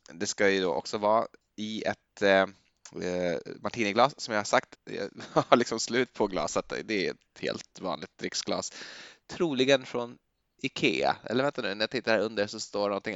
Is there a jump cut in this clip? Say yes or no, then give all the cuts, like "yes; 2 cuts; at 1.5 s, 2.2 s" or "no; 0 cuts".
yes; 1 cut; at 4.7 s